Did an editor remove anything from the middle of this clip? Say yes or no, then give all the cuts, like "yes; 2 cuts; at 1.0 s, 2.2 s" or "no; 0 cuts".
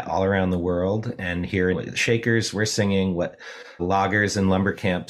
yes; 2 cuts; at 1.7 s, 3.8 s